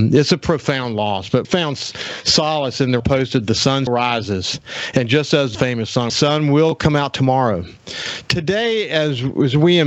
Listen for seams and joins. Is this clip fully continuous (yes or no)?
no